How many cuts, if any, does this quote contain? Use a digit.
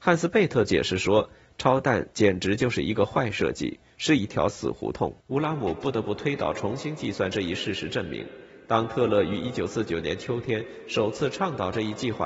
1